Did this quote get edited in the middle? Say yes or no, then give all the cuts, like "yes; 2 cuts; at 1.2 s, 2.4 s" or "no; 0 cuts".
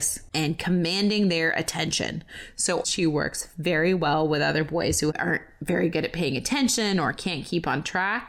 no; 0 cuts